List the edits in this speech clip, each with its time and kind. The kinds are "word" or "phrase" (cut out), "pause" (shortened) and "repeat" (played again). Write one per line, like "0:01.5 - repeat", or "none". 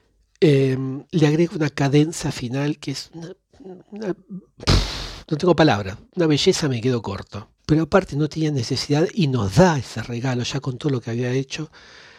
0:01.1 - pause
0:06.1 - pause
0:07.6 - pause